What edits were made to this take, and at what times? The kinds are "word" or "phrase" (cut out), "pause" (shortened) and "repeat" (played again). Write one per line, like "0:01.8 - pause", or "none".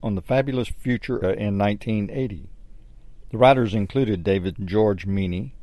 0:01.2 - word
0:04.5 - word